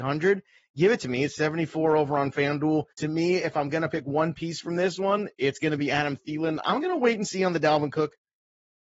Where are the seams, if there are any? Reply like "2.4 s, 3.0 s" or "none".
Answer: 2.9 s